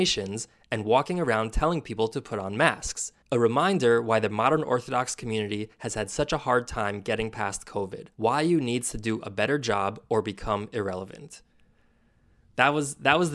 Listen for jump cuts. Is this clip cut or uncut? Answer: cut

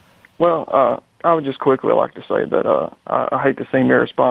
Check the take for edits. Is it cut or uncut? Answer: uncut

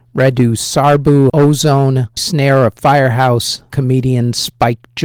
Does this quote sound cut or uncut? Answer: cut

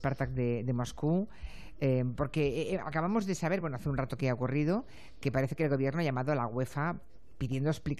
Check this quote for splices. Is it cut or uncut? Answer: uncut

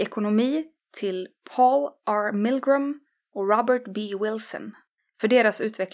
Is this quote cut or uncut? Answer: uncut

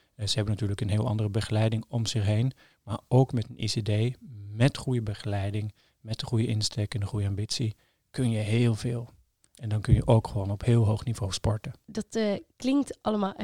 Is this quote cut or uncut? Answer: uncut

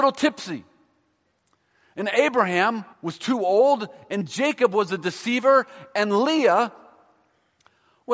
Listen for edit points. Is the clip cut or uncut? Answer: cut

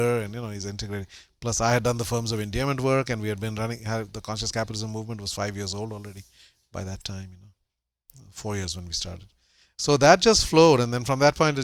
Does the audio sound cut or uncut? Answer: uncut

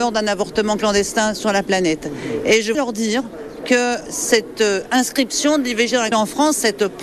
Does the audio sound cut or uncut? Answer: cut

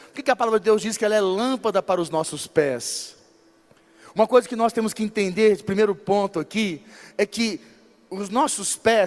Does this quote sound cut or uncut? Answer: uncut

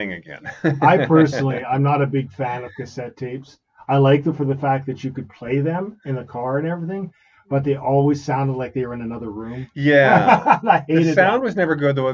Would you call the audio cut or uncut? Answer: uncut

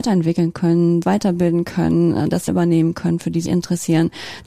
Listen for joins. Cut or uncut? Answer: cut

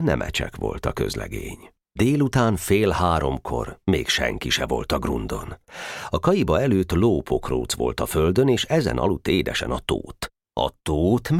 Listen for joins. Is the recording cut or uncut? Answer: cut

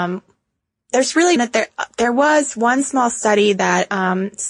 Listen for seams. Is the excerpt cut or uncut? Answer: cut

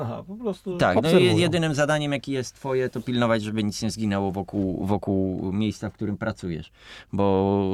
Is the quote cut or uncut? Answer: uncut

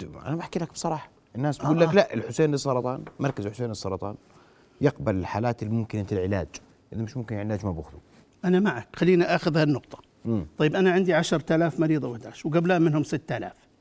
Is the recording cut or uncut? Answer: uncut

